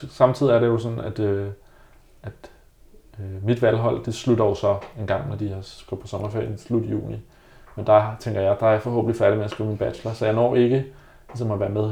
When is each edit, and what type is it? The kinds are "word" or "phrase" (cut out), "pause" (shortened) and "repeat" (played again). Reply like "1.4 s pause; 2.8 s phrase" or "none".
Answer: none